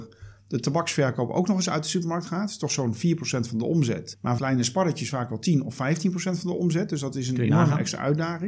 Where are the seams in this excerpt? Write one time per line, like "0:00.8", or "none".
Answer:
0:04.4